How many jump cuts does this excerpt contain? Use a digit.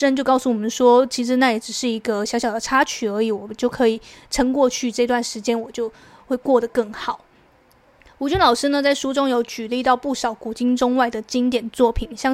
0